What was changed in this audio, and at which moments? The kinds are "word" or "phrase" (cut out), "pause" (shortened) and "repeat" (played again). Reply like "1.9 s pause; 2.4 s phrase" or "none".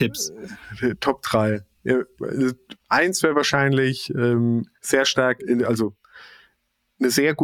2.8 s pause; 4.7 s pause; 5.4 s word